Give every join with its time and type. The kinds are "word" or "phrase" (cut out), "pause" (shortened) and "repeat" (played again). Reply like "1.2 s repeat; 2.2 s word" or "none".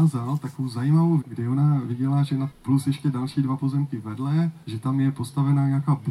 1.2 s phrase; 2.5 s phrase; 4.6 s pause